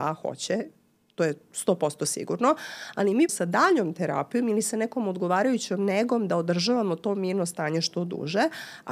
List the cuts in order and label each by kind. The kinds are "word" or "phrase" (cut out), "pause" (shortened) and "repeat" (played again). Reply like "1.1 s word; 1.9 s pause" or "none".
3.3 s word